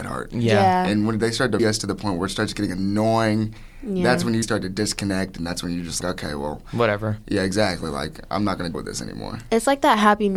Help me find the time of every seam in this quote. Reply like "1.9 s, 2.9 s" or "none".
1.6 s, 4.4 s, 6.0 s, 8.7 s